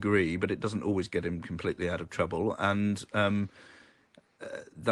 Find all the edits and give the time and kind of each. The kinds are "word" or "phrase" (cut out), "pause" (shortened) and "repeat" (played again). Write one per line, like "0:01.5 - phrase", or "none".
none